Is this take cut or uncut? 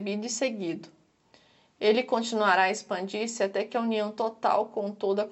uncut